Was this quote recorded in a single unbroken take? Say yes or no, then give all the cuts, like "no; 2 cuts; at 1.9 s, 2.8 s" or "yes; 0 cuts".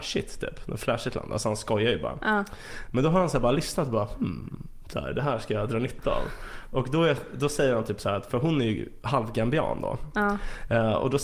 yes; 0 cuts